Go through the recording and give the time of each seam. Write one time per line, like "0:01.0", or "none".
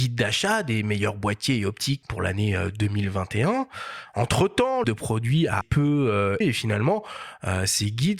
0:02.0
0:04.8
0:05.6
0:06.4